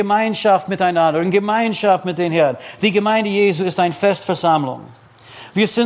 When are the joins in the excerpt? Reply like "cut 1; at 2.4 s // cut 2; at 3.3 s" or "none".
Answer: none